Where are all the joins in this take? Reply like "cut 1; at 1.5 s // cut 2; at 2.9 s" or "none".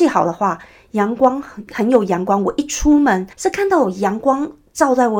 cut 1; at 3.3 s